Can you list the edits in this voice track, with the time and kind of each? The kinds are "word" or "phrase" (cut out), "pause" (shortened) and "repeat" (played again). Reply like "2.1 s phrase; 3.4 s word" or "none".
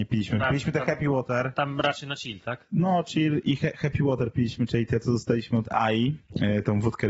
none